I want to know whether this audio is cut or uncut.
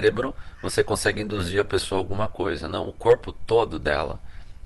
uncut